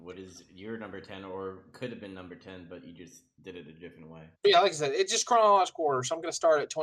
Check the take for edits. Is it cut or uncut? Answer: cut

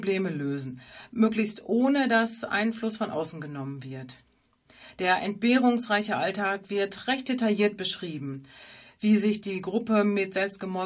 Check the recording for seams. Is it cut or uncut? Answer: uncut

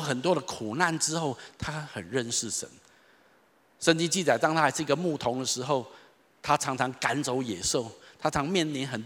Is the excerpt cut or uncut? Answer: uncut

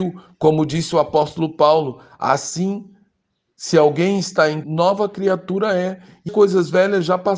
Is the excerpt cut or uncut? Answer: cut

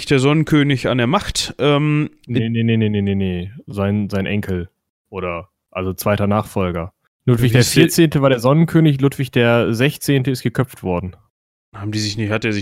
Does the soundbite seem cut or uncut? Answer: uncut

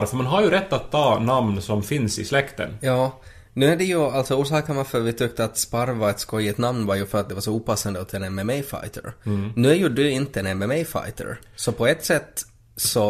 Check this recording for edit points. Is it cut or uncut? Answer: uncut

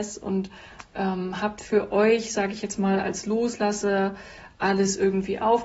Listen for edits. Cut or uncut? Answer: uncut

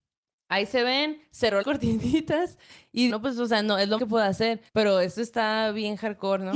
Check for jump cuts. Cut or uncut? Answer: cut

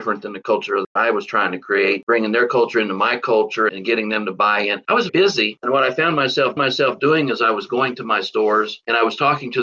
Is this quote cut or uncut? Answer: cut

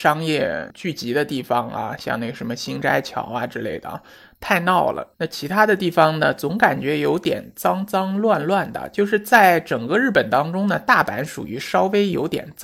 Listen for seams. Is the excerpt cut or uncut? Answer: cut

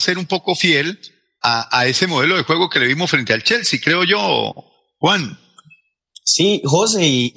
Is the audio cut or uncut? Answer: uncut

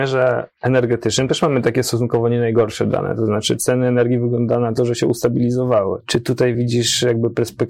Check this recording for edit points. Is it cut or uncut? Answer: uncut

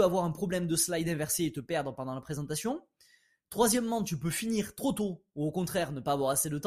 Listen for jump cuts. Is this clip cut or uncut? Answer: uncut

